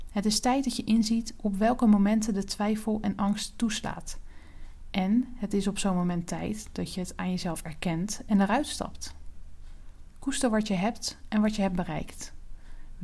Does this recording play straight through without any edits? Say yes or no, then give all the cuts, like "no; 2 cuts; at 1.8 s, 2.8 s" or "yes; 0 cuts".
yes; 0 cuts